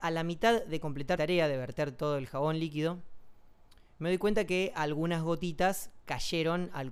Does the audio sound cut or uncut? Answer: cut